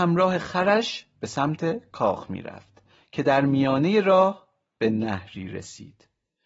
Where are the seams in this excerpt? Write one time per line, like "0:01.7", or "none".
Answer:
none